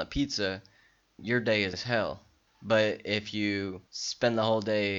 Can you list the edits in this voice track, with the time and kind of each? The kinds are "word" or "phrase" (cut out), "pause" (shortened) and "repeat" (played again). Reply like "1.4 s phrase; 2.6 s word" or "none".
1.2 s word; 1.7 s word; 2.5 s pause; 3.9 s pause